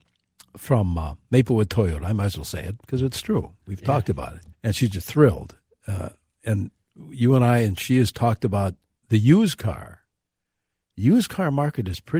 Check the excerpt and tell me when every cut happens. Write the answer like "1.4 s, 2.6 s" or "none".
4.5 s